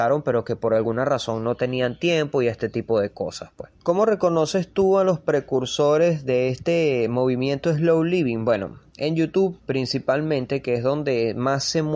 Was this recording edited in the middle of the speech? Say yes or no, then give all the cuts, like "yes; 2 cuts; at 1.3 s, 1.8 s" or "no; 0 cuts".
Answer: yes; 1 cut; at 3.8 s